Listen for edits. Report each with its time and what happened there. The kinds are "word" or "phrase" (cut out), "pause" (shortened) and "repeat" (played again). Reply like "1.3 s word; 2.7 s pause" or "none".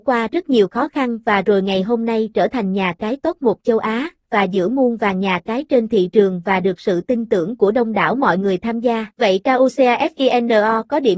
9.1 s pause